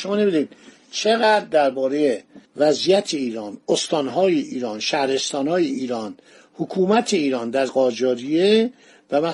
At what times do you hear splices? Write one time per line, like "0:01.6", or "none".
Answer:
0:07.7